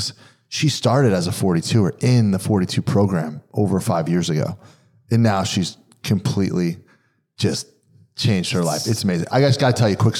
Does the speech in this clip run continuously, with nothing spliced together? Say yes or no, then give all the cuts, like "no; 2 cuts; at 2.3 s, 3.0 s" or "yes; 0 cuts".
yes; 0 cuts